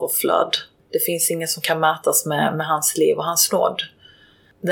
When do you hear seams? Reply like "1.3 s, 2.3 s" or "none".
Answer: none